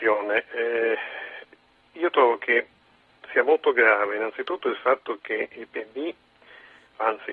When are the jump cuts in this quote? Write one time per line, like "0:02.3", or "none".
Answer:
none